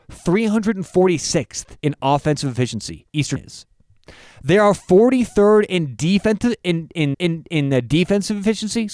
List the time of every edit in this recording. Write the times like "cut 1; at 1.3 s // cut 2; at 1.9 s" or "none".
cut 1; at 1.8 s // cut 2; at 3.4 s // cut 3; at 7.1 s